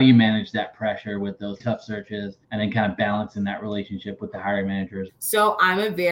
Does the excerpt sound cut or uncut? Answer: cut